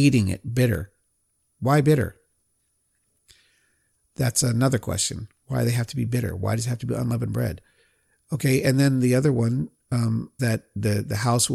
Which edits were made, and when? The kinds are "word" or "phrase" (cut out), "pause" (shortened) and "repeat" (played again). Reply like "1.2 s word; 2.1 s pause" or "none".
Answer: 10.4 s word